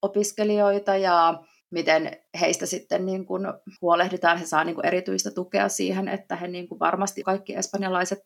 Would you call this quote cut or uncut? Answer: cut